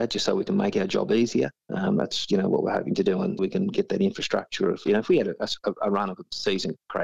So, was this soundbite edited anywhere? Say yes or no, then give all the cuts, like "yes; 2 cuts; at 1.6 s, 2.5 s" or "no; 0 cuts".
yes; 1 cut; at 3.4 s